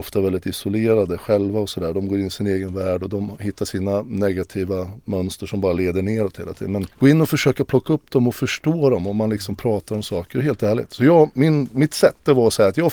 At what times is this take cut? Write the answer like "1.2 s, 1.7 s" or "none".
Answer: 6.9 s, 11.3 s